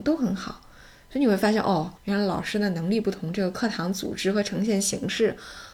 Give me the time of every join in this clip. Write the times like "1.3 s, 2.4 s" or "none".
2.0 s

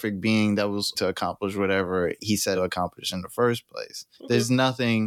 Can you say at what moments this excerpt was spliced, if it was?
0.9 s, 2.5 s, 4.1 s

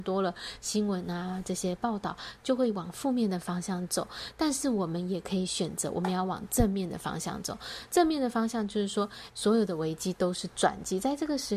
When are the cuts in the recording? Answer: 9.3 s

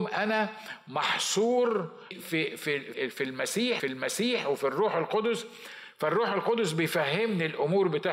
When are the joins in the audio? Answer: 2.1 s, 2.9 s, 3.8 s

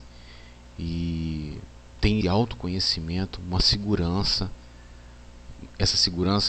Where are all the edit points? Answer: 2.2 s

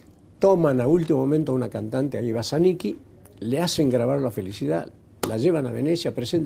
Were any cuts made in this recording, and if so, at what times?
none

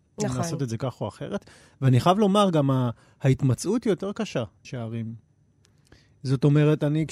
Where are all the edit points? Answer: 4.6 s

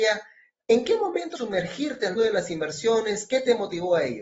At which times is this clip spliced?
1.4 s, 2.2 s

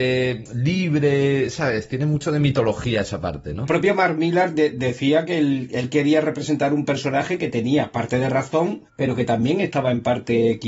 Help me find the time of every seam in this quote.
8.9 s

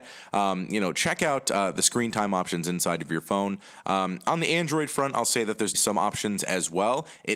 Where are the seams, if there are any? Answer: 5.7 s

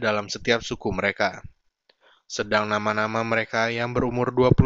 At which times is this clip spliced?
none

